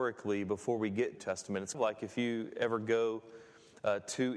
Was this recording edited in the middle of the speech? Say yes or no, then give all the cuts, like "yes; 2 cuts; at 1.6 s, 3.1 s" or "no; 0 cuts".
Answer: yes; 2 cuts; at 1.2 s, 1.7 s